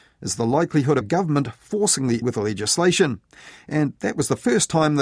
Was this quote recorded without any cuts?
no; 2 cuts; at 1.0 s, 2.2 s

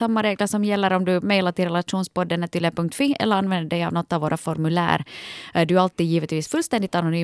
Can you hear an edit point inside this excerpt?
no; 0 cuts

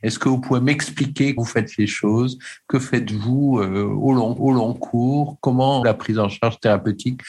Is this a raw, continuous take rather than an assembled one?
no; 3 cuts; at 1.4 s, 4.4 s, 5.8 s

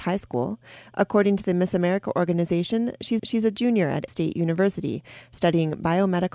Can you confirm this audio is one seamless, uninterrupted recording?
no; 2 cuts; at 3.2 s, 4.1 s

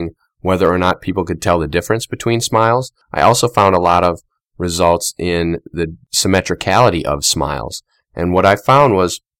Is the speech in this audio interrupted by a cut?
no; 0 cuts

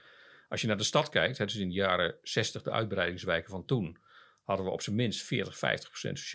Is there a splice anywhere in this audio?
no; 0 cuts

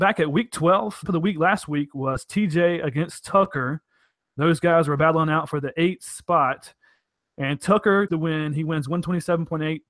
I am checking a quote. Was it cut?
yes; 2 cuts; at 1.0 s, 8.1 s

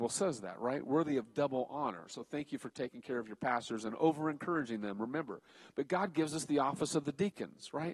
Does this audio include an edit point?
no; 0 cuts

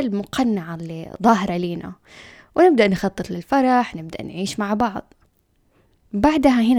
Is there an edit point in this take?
no; 0 cuts

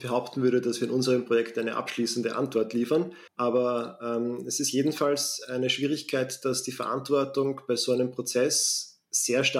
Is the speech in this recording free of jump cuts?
no; 1 cut; at 3.3 s

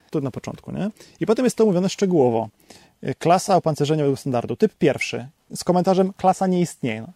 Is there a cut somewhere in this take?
no; 0 cuts

